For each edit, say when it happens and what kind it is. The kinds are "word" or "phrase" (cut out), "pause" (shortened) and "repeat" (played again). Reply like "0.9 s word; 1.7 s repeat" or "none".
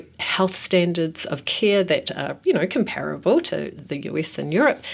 none

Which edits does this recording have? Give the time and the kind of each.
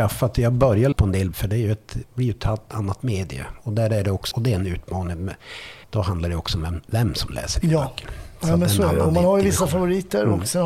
0.9 s word; 1.3 s word; 4.3 s word; 5.8 s pause

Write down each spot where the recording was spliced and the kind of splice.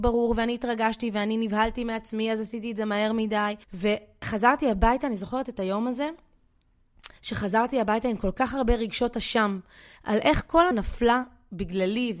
3.6 s pause; 7.2 s pause; 10.7 s word

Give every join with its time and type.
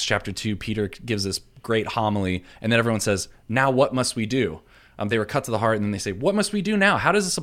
none

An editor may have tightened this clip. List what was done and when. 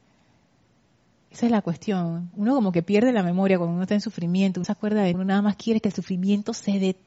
4.6 s word; 5.1 s word

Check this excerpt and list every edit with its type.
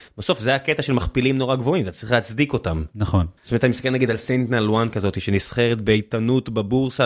3.4 s pause

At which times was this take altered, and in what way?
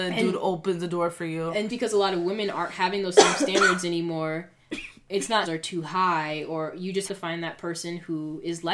1.7 s word; 5.5 s phrase; 7.1 s word

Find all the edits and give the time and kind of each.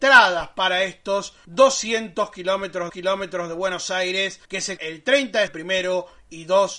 2.9 s repeat; 4.4 s pause; 4.8 s word; 5.5 s word

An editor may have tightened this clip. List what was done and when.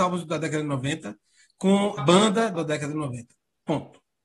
2.0 s word; 2.5 s word

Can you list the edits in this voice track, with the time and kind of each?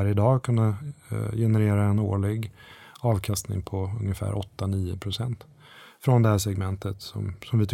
none

